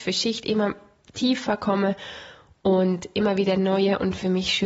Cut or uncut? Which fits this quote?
uncut